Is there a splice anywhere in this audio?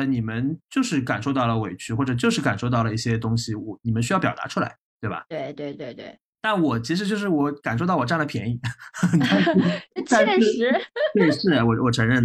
yes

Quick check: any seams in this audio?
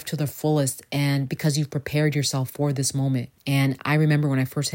yes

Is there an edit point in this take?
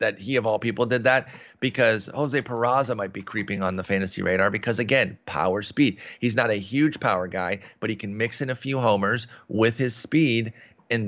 no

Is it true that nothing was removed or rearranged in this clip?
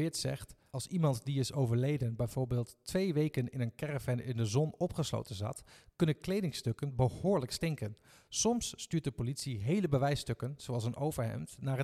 yes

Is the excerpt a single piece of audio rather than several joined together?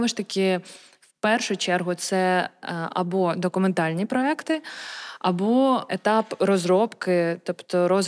yes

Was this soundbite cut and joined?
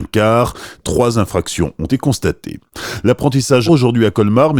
yes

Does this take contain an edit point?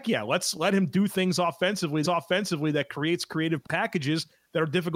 yes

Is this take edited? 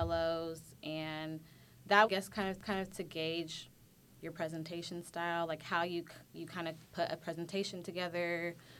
yes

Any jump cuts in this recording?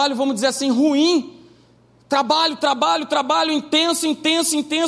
no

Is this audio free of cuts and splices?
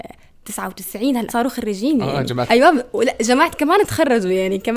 no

